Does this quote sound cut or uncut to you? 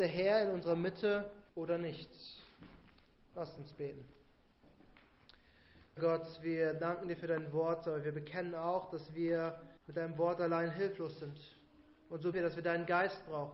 cut